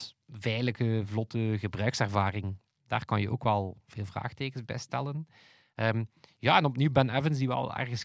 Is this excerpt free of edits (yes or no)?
yes